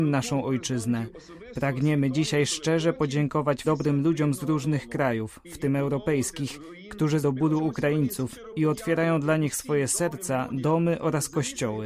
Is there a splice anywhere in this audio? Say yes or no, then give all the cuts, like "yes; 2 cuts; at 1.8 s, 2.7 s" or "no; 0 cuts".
yes; 2 cuts; at 3.6 s, 7.2 s